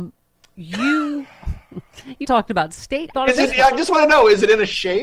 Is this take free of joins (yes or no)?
no